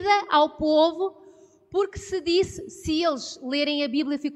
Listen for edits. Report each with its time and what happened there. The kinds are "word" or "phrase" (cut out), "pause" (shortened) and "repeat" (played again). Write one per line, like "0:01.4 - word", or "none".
none